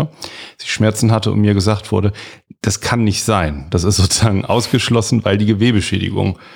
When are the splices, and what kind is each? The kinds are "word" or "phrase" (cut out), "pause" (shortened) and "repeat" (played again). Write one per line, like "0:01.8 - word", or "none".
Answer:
none

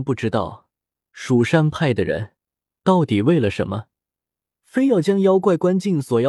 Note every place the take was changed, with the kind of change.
none

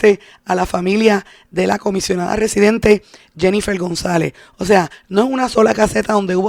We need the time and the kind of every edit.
none

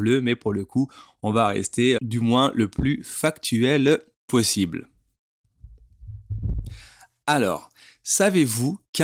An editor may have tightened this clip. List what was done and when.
0:02.0 - word

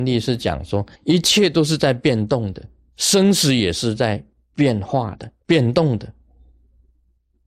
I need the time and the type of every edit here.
0:00.9 - pause
0:02.9 - pause
0:05.4 - pause

